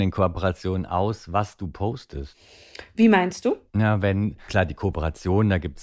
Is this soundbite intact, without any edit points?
no; 2 cuts; at 3.7 s, 4.5 s

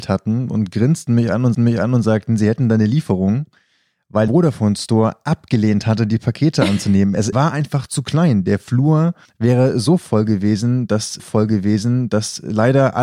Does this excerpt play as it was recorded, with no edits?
no; 5 cuts; at 1.5 s, 4.3 s, 7.3 s, 9.2 s, 11.2 s

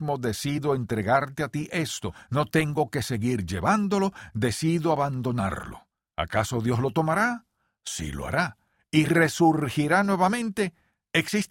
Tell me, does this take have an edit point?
no; 0 cuts

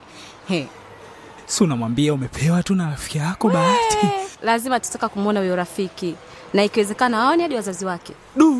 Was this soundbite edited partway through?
no; 0 cuts

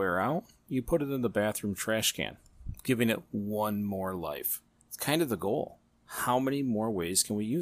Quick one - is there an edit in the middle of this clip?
no; 0 cuts

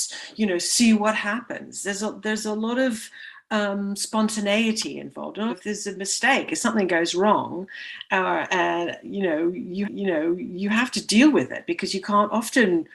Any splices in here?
yes; 2 cuts; at 5.5 s, 9.8 s

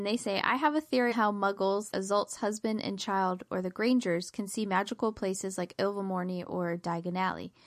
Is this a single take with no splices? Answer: no; 2 cuts; at 1.1 s, 1.9 s

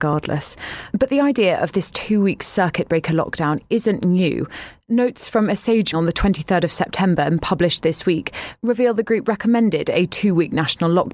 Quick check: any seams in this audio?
yes; 1 cut; at 5.9 s

